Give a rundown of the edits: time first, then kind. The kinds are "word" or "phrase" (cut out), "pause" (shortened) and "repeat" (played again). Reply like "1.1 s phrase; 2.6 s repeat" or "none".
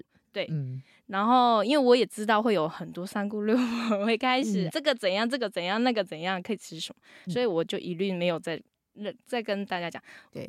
4.7 s word